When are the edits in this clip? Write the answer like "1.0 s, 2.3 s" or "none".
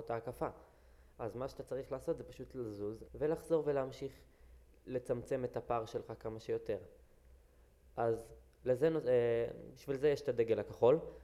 3.1 s